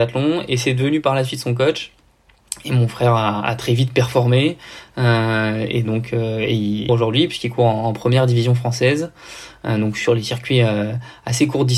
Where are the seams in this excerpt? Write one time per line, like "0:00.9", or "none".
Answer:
0:06.9